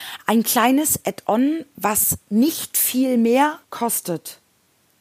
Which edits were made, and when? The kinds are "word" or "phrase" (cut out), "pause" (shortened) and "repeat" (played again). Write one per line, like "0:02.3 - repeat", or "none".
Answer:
0:03.6 - pause